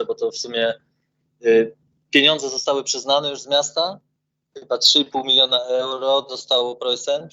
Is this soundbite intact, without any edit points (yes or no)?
yes